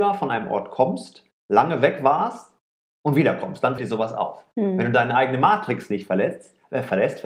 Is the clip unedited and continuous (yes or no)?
no